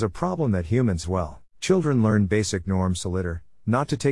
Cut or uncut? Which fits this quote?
cut